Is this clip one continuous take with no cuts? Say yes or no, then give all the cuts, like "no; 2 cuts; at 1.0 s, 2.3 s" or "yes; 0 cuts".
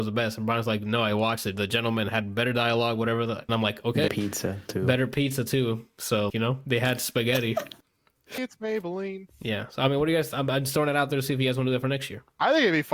no; 4 cuts; at 3.5 s, 4.1 s, 6.3 s, 8.4 s